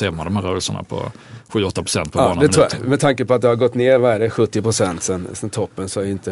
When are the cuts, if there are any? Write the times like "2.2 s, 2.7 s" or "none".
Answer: none